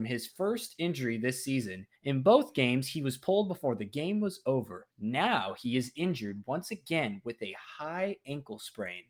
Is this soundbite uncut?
no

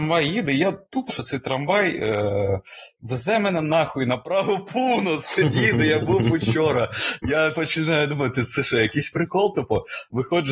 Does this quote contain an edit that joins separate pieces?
yes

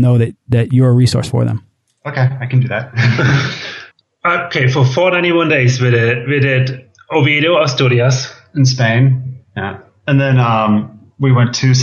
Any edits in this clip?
yes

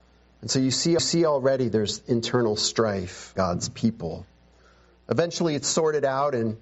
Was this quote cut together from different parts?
yes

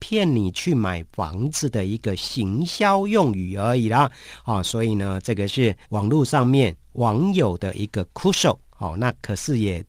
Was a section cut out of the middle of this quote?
yes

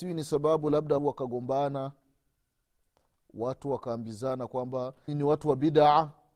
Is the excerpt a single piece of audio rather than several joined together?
no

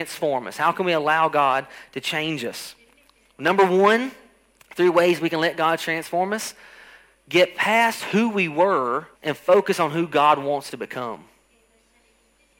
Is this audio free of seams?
no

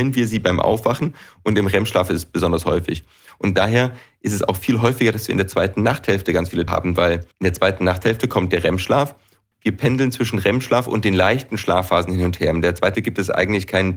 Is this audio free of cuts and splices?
no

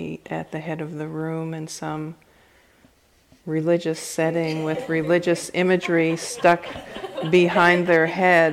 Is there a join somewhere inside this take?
no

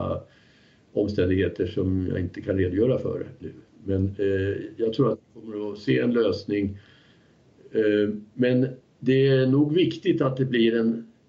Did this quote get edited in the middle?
yes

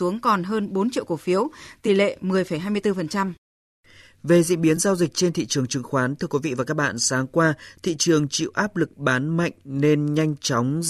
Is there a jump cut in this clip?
no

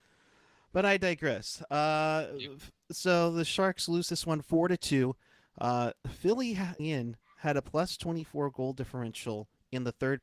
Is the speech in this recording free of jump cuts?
no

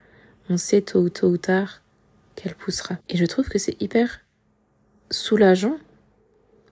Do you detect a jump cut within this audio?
yes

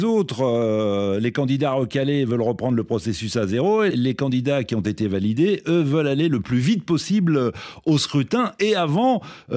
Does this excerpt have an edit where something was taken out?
yes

